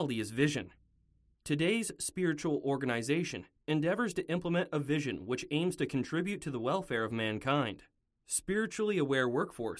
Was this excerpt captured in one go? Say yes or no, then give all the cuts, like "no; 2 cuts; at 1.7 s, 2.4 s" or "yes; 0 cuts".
yes; 0 cuts